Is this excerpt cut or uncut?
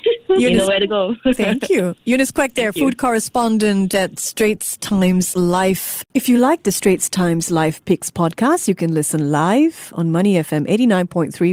uncut